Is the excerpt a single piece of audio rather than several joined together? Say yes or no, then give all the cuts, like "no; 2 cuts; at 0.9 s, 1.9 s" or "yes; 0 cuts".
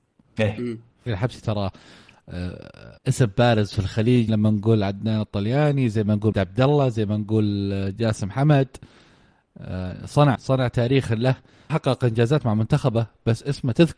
no; 6 cuts; at 1.1 s, 3.0 s, 4.3 s, 6.3 s, 10.3 s, 11.7 s